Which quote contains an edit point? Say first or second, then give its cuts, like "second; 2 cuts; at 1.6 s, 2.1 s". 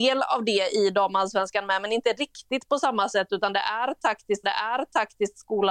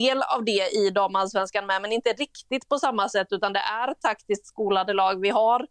first; 1 cut; at 4.4 s